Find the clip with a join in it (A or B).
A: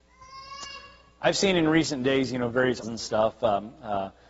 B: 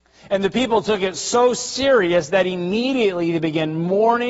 A